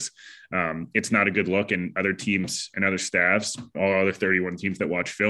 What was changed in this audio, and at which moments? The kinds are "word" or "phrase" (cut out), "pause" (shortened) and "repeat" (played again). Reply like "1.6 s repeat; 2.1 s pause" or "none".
3.7 s word